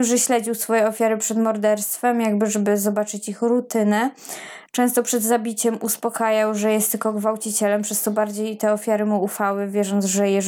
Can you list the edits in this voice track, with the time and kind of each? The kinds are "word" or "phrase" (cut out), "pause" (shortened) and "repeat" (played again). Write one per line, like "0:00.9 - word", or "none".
none